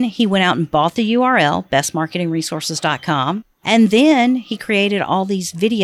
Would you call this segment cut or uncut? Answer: uncut